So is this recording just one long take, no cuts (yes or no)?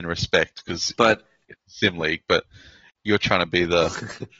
yes